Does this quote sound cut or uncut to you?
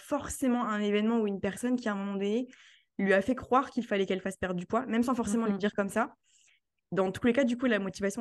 uncut